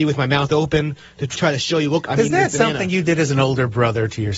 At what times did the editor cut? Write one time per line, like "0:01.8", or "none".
0:01.4